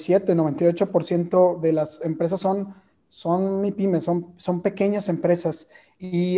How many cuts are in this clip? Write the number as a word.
zero